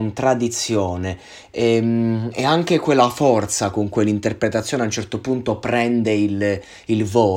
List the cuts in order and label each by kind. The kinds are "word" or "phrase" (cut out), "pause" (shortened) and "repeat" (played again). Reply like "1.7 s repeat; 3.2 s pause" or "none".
4.0 s word